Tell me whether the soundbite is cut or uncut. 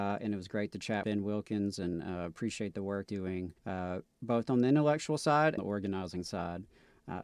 cut